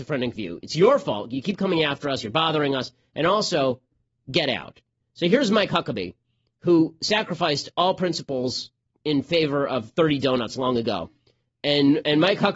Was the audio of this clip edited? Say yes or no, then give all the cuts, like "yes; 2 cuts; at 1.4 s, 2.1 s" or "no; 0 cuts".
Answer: no; 0 cuts